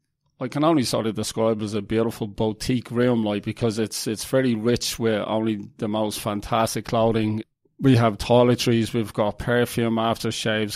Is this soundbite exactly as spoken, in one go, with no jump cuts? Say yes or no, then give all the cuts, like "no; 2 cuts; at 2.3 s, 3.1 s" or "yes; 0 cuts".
yes; 0 cuts